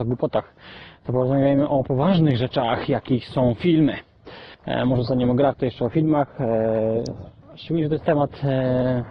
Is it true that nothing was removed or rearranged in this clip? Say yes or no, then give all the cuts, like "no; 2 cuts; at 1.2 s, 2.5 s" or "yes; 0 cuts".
no; 1 cut; at 4.5 s